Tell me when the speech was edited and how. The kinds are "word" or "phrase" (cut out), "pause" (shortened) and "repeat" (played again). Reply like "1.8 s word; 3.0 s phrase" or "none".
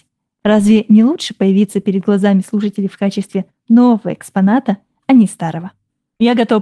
none